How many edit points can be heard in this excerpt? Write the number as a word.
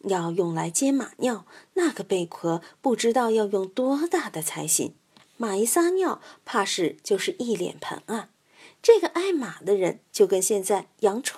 zero